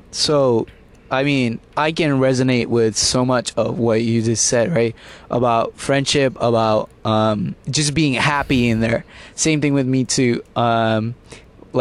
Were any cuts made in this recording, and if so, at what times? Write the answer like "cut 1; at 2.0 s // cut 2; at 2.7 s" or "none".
none